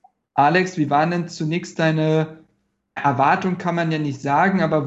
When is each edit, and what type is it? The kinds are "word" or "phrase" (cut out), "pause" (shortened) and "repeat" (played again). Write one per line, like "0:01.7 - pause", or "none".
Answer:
0:03.0 - word